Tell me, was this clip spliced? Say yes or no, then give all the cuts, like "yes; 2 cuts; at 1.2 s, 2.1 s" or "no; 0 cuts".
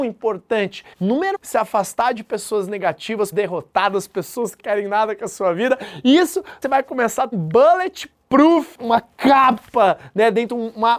yes; 6 cuts; at 0.9 s, 1.3 s, 3.3 s, 4.6 s, 6.6 s, 7.3 s